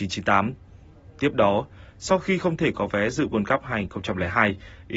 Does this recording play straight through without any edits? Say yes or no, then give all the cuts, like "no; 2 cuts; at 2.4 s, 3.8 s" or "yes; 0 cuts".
yes; 0 cuts